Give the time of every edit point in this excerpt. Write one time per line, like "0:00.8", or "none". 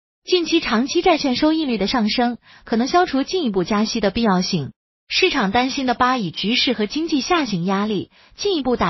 none